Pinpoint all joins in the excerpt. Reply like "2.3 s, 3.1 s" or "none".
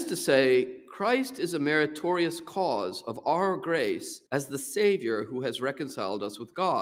4.3 s